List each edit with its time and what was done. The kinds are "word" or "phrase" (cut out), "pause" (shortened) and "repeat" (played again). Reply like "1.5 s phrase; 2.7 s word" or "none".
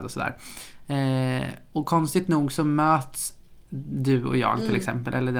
none